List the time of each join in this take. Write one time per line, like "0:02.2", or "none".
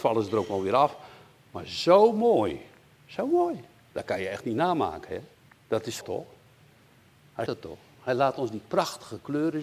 0:02.9
0:05.3
0:06.0
0:07.5